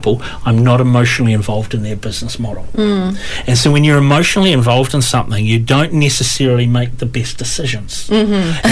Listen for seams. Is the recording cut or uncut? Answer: uncut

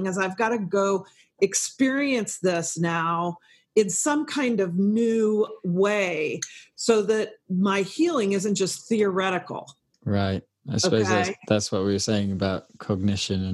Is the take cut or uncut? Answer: uncut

